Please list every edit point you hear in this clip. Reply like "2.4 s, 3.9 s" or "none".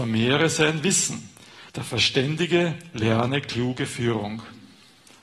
1.7 s